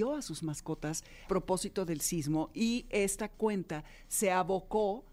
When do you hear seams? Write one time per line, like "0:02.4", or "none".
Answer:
0:01.3